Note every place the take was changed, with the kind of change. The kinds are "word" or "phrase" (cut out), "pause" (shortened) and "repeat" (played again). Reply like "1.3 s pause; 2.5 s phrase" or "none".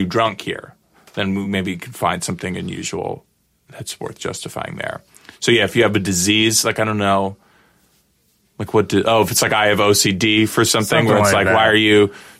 none